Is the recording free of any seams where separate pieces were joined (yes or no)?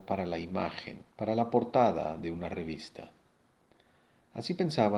yes